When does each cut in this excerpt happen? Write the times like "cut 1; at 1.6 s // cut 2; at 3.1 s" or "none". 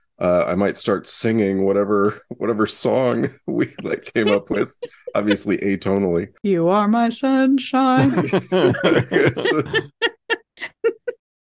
none